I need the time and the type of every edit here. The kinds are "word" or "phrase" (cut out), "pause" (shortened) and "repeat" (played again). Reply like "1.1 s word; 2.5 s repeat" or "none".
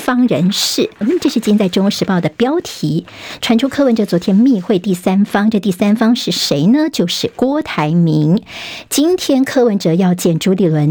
1.0 s word